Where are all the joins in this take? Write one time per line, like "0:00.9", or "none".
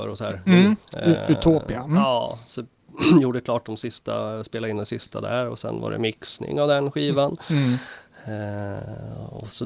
none